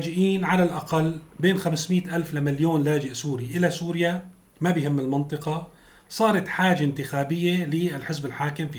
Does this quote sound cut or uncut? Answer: uncut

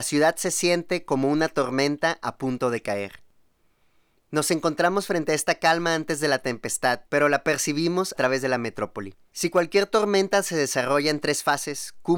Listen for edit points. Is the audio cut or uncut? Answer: cut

